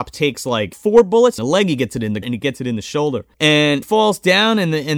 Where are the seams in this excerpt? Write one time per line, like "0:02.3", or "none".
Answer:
0:01.4
0:02.2
0:03.8